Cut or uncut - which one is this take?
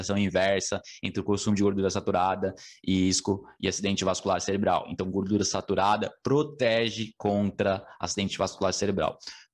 uncut